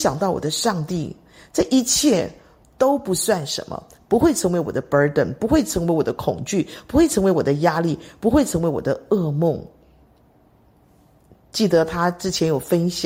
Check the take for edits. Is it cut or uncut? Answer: uncut